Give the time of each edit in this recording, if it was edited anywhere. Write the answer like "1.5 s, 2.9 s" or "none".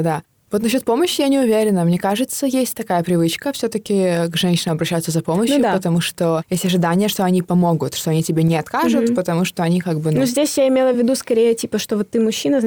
none